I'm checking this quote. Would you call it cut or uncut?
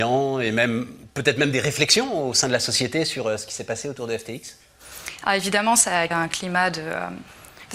cut